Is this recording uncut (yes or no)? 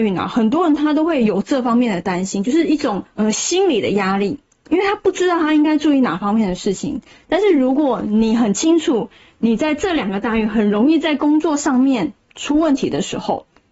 yes